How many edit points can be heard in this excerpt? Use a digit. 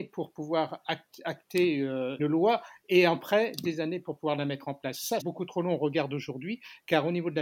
2